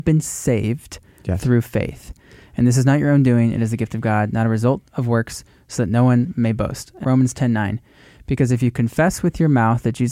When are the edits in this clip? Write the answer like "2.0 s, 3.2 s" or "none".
7.0 s